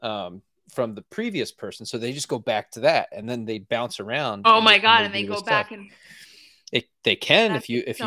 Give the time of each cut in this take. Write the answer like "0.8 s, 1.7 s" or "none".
none

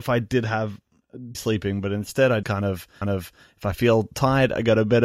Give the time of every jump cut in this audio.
1.3 s, 2.4 s, 3.0 s

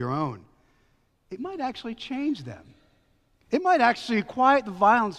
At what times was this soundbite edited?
none

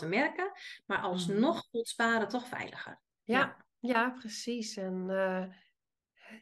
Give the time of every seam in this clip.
3.1 s

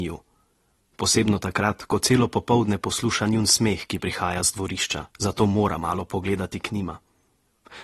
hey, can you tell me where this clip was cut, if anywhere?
5.1 s

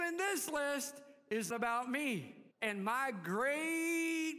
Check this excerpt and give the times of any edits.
1.5 s, 2.5 s

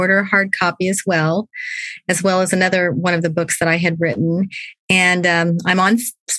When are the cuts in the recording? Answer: none

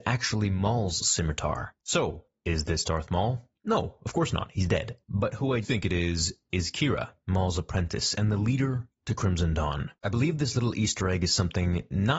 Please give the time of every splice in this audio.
5.6 s, 7.2 s

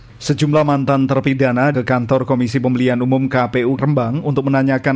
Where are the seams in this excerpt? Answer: 1.7 s, 3.8 s

